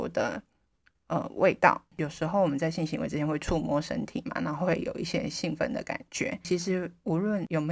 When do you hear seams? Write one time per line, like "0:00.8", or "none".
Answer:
none